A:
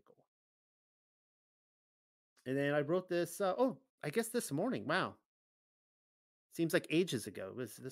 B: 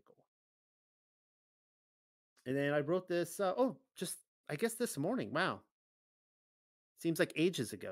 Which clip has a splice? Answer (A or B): A